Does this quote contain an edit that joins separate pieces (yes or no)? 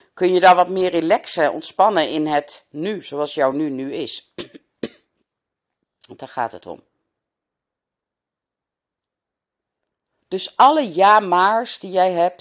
no